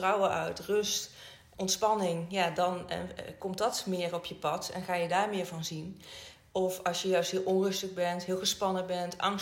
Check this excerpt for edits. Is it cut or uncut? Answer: cut